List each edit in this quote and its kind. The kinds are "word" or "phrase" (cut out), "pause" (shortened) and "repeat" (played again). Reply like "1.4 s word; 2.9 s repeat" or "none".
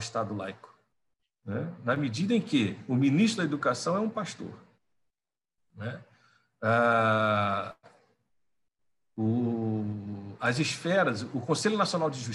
none